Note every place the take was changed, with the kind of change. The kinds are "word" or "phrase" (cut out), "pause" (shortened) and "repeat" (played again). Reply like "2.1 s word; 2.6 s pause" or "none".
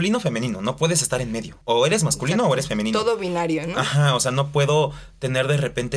1.6 s pause